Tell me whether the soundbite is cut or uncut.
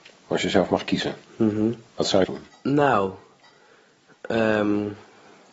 cut